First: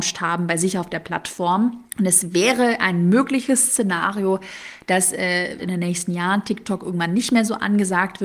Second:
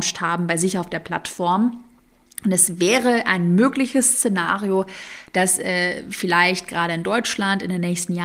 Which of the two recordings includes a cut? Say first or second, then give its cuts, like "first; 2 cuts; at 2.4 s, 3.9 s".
first; 2 cuts; at 1.9 s, 5.6 s